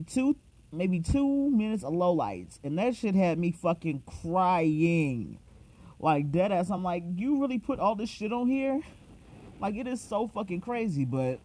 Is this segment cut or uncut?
uncut